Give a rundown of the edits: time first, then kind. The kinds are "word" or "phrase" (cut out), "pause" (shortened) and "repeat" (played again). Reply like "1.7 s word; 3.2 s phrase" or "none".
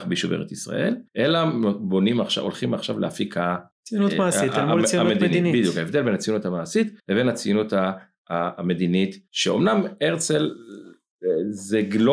1.1 s pause; 3.7 s pause; 7.0 s pause; 9.3 s pause